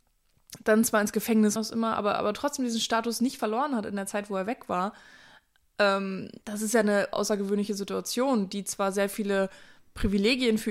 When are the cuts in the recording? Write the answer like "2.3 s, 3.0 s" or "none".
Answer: 1.6 s, 3.4 s, 6.4 s, 7.1 s